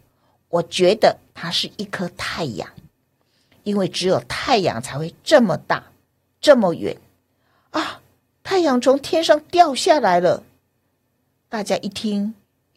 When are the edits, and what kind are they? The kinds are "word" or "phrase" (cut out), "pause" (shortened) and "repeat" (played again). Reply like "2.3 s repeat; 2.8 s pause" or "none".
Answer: none